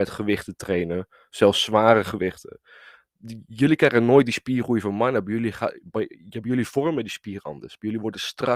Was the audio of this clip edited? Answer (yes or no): no